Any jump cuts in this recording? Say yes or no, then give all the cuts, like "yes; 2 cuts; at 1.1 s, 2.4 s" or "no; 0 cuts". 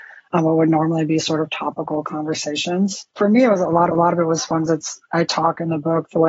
yes; 3 cuts; at 3.1 s, 3.9 s, 4.7 s